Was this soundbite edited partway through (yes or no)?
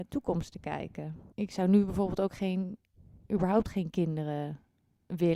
yes